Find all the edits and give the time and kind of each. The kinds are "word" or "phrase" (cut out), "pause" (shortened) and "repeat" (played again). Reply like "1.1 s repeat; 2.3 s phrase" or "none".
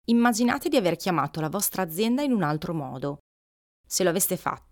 none